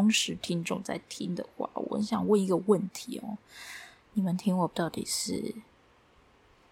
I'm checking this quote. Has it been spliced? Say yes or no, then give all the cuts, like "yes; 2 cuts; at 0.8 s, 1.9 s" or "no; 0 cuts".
yes; 1 cut; at 4.7 s